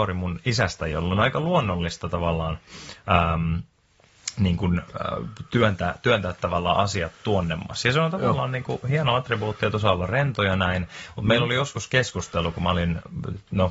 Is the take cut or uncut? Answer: uncut